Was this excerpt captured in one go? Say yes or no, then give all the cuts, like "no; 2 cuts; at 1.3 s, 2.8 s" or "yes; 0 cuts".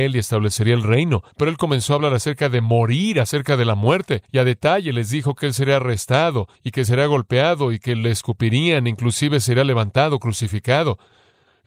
no; 3 cuts; at 1.3 s, 4.2 s, 6.5 s